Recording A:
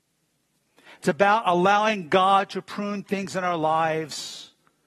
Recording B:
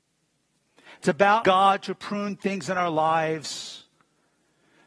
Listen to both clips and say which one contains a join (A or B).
B